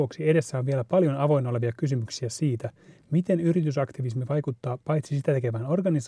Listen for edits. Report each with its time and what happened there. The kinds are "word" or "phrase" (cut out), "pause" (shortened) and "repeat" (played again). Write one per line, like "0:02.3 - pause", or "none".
none